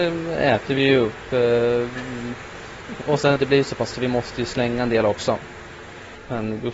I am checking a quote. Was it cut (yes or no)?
yes